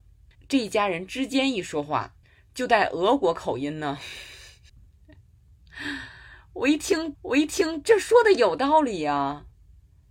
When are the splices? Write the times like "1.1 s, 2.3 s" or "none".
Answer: 2.2 s, 4.7 s, 7.1 s